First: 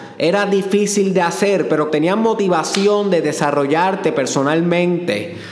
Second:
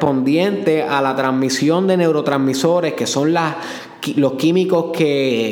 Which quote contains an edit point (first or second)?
first